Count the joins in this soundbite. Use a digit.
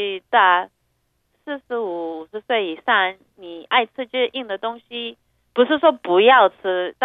0